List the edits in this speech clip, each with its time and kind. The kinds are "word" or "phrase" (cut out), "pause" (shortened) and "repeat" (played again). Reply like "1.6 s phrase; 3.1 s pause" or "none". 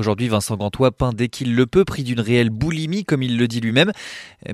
none